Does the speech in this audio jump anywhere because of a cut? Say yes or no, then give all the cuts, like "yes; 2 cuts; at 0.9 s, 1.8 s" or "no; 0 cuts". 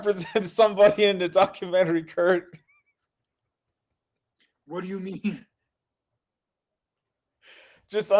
no; 0 cuts